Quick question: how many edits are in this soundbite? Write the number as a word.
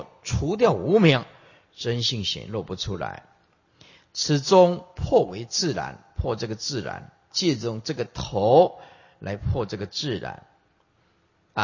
one